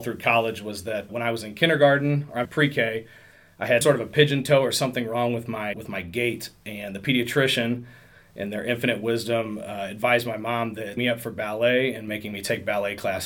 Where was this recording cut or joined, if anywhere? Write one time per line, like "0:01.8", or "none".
0:01.1
0:02.5
0:03.8
0:05.7
0:11.0